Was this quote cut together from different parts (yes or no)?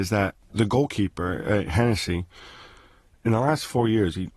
no